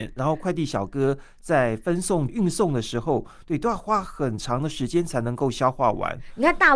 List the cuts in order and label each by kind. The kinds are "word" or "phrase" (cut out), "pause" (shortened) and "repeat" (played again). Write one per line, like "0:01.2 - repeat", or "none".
0:02.3 - phrase